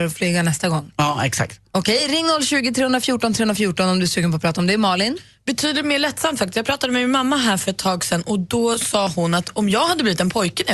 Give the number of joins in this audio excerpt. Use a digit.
0